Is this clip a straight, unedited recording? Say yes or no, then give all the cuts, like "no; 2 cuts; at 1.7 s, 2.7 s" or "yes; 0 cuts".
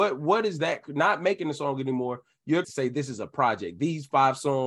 no; 1 cut; at 2.6 s